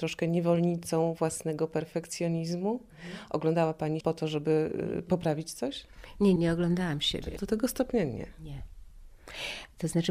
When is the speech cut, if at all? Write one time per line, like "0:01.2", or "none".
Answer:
0:04.0
0:06.4
0:07.4

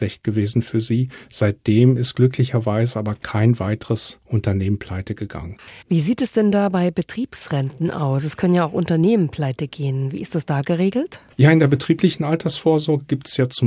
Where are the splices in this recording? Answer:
0:05.8
0:11.3

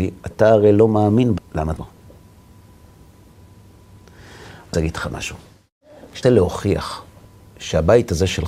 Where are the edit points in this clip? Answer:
0:01.4
0:01.8
0:04.7
0:06.2

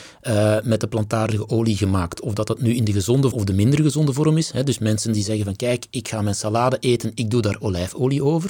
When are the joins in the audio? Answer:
0:03.3

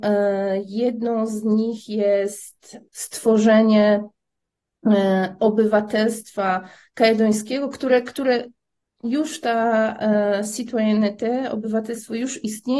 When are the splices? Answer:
none

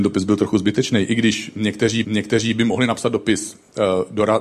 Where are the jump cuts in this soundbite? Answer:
0:02.0

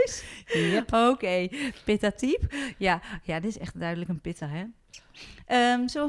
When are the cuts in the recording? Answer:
none

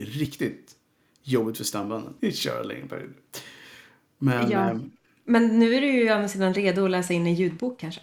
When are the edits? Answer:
0:02.2

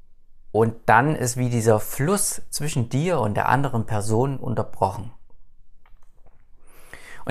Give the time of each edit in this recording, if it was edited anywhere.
none

